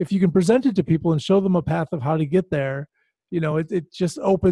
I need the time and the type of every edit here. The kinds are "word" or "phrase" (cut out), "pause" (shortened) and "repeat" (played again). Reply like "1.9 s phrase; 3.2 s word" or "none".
none

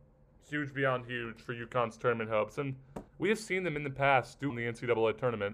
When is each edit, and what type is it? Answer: 3.1 s pause; 4.5 s word

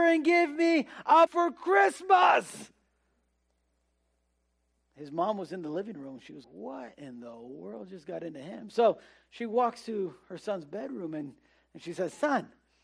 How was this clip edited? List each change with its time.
1.3 s word; 6.4 s word

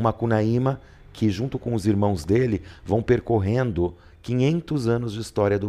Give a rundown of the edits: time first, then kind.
none

